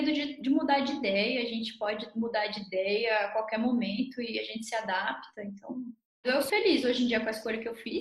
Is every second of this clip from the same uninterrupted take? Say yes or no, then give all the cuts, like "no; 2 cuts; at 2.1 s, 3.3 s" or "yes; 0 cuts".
no; 1 cut; at 6.5 s